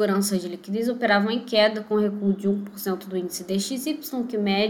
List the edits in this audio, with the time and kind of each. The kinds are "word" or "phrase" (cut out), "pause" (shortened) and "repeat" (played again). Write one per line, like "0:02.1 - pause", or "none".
none